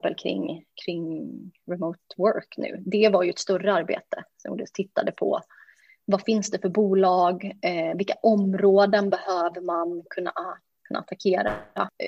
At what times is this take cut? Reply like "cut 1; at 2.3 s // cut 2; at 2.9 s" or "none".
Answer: none